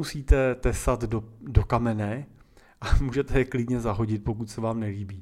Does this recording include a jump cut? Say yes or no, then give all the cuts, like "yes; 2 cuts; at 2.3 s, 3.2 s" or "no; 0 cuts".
no; 0 cuts